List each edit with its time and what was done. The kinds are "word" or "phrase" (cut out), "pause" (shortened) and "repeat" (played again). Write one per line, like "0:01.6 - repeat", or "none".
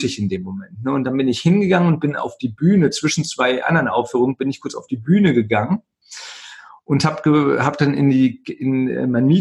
none